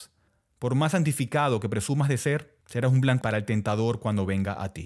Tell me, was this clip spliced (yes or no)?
yes